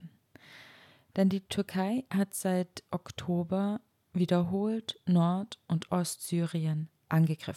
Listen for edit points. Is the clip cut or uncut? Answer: uncut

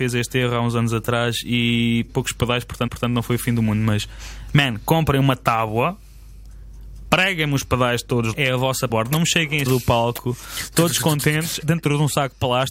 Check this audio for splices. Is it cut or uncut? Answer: cut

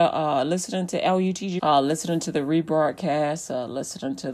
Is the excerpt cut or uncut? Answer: cut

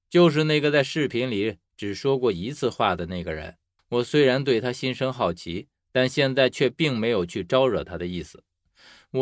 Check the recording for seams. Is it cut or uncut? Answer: cut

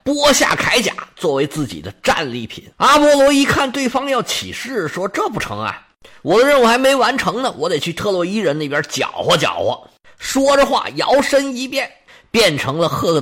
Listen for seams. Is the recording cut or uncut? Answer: uncut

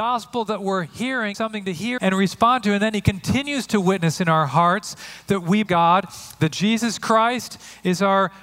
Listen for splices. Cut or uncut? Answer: cut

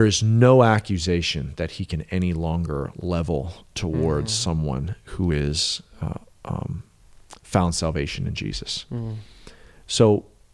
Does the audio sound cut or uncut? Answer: uncut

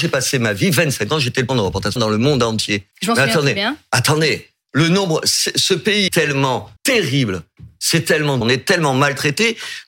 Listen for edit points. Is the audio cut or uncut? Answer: cut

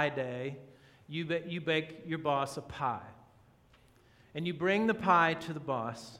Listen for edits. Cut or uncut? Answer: uncut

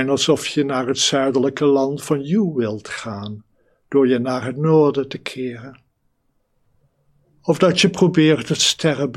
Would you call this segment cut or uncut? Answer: uncut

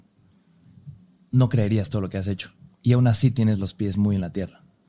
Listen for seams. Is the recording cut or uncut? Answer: cut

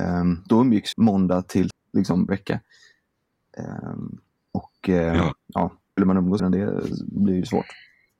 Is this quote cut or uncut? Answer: cut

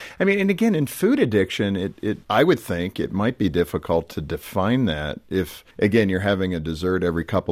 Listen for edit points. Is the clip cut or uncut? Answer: cut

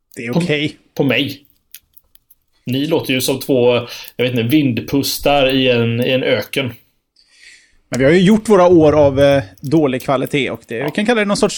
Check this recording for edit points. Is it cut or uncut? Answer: uncut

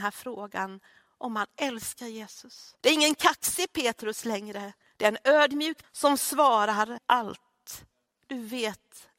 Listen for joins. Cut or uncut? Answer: cut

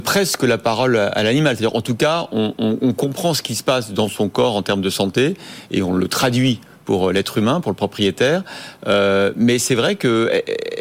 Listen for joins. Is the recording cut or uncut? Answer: uncut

